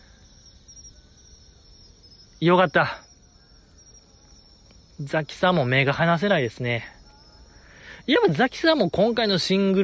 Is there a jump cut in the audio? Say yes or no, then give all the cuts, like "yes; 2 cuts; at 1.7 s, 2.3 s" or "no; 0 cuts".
no; 0 cuts